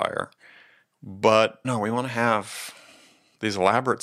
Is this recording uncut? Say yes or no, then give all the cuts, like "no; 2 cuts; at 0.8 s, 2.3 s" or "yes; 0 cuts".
no; 1 cut; at 1.6 s